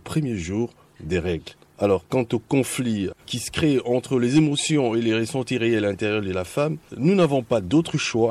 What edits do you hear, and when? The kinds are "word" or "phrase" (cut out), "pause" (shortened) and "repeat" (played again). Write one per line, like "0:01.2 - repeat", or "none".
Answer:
0:06.9 - pause

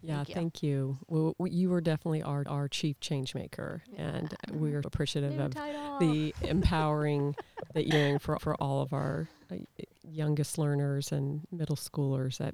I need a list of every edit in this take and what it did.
0:02.5 - repeat
0:04.8 - word
0:07.9 - word
0:08.4 - repeat

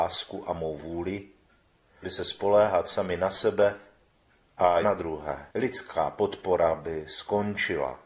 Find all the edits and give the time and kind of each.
0:02.0 - word
0:04.8 - phrase
0:05.5 - pause

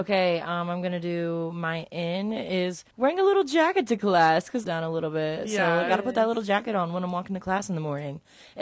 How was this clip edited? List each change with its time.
0:02.9 - pause
0:04.6 - phrase

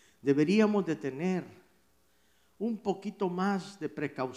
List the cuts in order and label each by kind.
none

